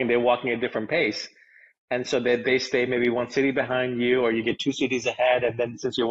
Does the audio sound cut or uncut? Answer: uncut